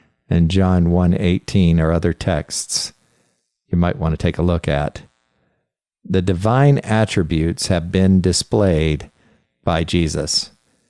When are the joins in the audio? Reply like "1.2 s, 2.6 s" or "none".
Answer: none